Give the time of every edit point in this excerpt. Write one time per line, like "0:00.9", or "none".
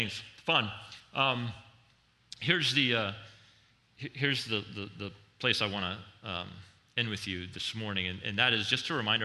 none